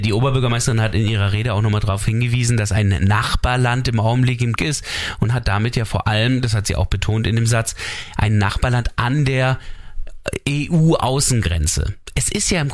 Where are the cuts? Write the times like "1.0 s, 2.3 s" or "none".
4.6 s